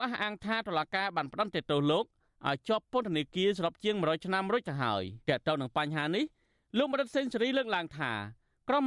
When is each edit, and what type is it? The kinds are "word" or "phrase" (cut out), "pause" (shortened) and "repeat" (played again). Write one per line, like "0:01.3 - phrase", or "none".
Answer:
0:05.2 - pause